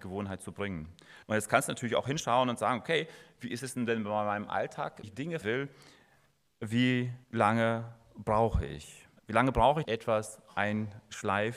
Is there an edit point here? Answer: yes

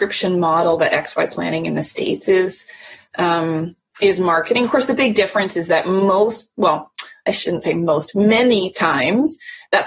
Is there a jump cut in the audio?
no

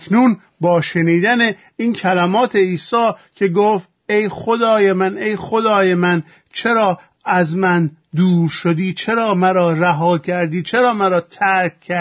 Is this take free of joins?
yes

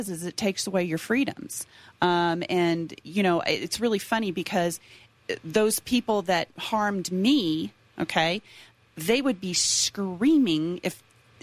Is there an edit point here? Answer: no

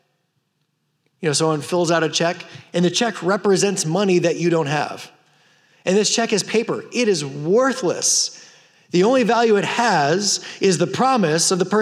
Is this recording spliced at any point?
no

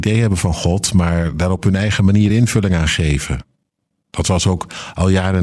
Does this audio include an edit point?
no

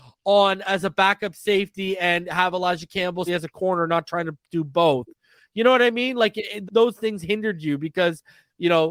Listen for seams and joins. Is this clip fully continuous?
no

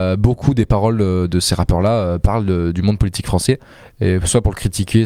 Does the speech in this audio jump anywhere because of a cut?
no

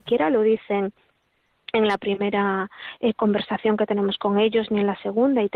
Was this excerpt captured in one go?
yes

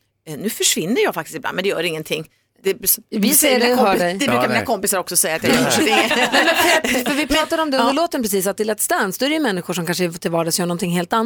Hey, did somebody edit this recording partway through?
no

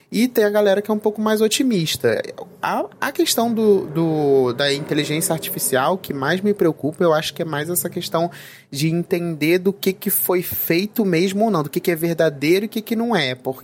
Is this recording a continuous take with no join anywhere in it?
yes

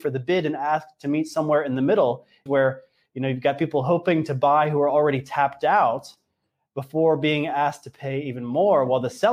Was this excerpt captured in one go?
no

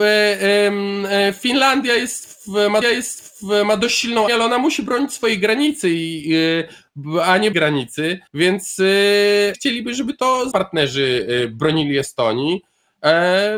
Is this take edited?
yes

